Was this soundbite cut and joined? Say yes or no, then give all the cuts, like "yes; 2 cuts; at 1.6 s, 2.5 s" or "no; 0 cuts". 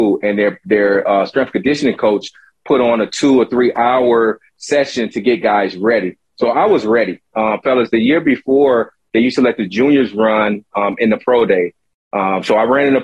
no; 0 cuts